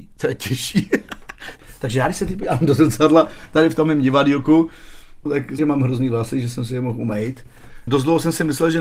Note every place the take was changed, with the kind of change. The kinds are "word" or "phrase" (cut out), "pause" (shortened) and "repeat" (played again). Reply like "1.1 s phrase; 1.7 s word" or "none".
5.3 s word; 5.6 s word